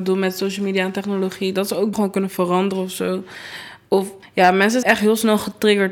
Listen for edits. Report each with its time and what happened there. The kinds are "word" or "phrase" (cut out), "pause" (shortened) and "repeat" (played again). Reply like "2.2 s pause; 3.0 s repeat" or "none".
1.9 s word; 4.2 s pause; 4.8 s word